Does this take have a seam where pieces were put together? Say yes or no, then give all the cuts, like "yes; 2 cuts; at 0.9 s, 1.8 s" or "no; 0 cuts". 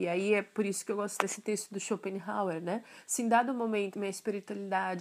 yes; 1 cut; at 3.9 s